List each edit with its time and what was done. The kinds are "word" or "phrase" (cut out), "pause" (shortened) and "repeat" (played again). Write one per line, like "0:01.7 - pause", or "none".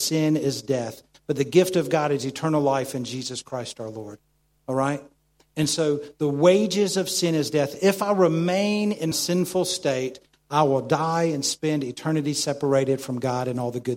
0:09.1 - word